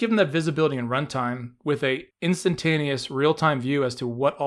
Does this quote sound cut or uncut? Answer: cut